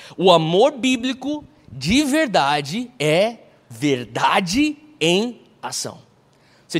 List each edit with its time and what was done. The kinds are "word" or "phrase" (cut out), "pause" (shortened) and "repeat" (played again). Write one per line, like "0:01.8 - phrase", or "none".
none